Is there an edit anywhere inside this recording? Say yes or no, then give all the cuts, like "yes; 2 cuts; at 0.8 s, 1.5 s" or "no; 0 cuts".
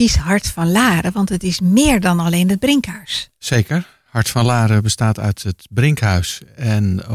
no; 0 cuts